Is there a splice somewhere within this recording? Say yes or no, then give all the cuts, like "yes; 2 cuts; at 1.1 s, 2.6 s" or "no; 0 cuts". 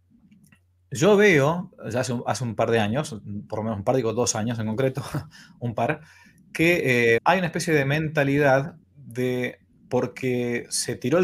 yes; 2 cuts; at 7.2 s, 8.8 s